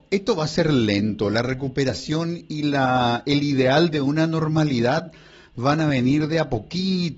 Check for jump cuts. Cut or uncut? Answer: uncut